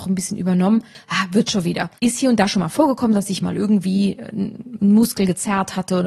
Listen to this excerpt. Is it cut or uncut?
cut